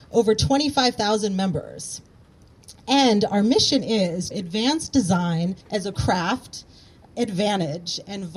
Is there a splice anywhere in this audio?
yes; 4 cuts; at 4.3 s, 5.6 s, 5.9 s, 7.0 s

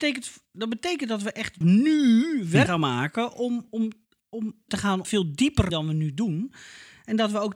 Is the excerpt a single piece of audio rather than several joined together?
no; 6 cuts; at 1.6 s, 2.7 s, 3.7 s, 4.7 s, 5.0 s, 5.7 s

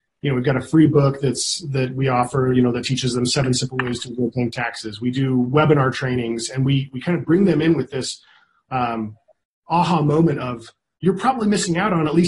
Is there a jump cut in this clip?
no; 0 cuts

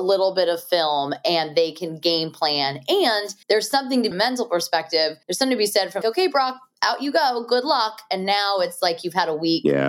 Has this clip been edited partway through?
yes; 4 cuts; at 3.4 s, 4.1 s, 5.2 s, 6.0 s

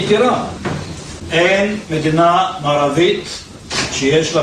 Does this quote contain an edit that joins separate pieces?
no; 0 cuts

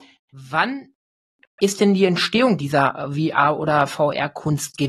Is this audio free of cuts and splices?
yes; 0 cuts

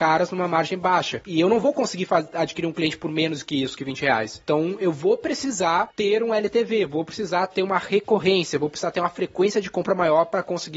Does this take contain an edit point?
no; 0 cuts

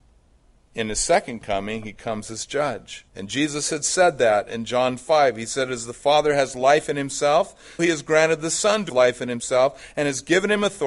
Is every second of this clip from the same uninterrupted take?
no; 3 cuts; at 3.1 s, 7.8 s, 8.9 s

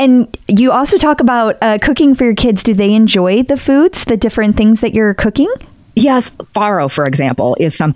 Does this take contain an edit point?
yes; 1 cut; at 5.7 s

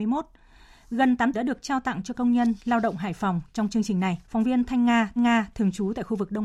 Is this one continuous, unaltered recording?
no; 3 cuts; at 1.3 s, 4.2 s, 5.2 s

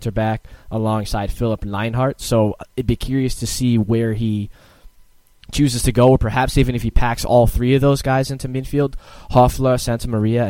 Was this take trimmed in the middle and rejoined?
no; 0 cuts

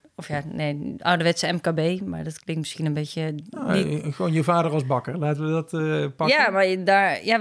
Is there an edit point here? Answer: no; 0 cuts

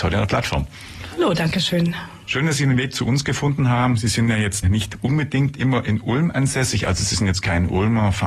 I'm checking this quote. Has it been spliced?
yes; 1 cut; at 4.6 s

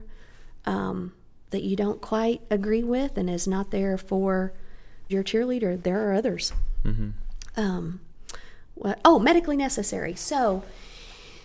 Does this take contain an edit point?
yes; 2 cuts; at 5.1 s, 5.8 s

